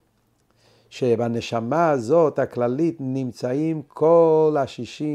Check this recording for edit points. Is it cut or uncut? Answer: uncut